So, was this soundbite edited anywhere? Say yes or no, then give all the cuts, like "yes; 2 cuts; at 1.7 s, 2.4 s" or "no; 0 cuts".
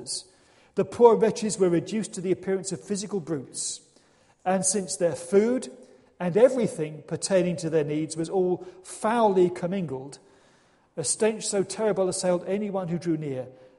no; 0 cuts